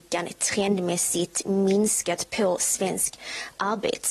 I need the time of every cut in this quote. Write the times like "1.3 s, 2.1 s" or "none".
none